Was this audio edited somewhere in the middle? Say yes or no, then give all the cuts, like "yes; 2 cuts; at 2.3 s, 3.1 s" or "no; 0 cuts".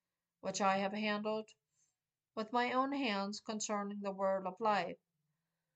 no; 0 cuts